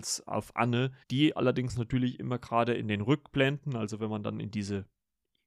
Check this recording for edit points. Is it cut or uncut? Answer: cut